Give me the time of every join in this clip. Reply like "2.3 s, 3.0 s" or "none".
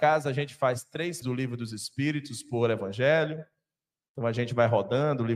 1.2 s